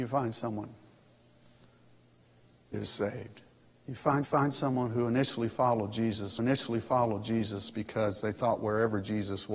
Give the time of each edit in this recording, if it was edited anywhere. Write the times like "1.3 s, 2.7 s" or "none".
2.7 s, 3.7 s, 4.2 s, 6.4 s